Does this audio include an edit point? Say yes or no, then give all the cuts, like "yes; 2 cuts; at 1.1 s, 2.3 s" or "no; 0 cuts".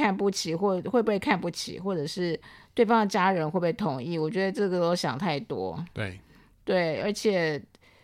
no; 0 cuts